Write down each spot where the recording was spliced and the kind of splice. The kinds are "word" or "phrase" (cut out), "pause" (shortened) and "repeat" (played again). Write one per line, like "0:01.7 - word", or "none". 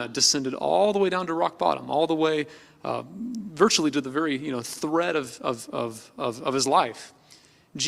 none